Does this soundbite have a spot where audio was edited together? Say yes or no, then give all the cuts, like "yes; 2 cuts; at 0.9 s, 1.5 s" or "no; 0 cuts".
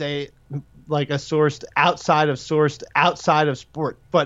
yes; 1 cut; at 2.4 s